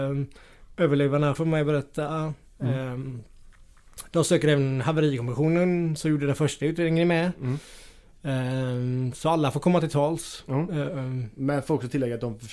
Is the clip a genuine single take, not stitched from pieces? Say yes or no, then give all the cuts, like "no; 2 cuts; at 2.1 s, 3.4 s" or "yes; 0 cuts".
no; 1 cut; at 1.3 s